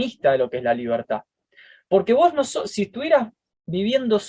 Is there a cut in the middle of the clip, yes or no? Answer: no